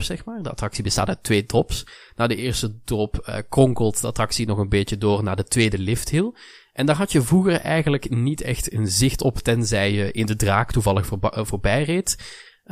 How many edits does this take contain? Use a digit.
0